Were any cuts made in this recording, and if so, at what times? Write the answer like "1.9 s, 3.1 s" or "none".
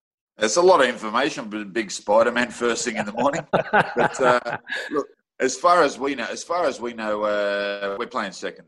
5.1 s

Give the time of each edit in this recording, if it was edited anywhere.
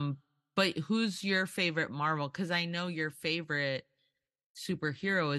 none

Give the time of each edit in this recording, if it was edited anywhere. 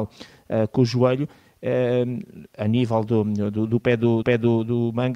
4.2 s

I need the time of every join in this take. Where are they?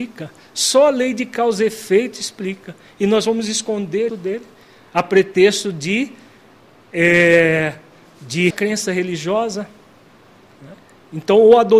4.1 s, 8.5 s

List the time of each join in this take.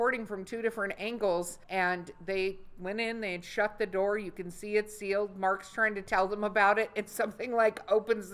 1.6 s

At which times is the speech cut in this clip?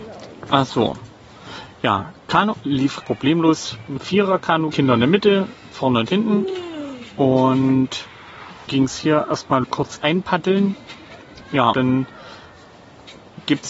2.5 s, 3.0 s, 4.0 s, 4.7 s, 5.7 s, 8.7 s, 9.6 s, 11.7 s

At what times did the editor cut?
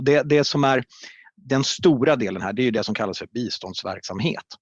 none

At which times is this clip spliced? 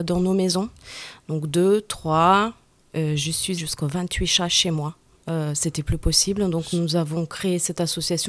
3.6 s

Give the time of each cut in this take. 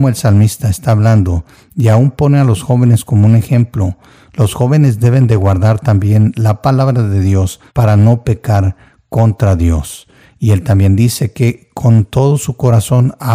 7.7 s

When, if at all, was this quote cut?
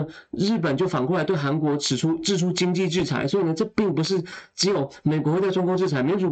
none

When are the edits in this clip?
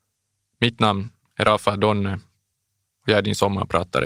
none

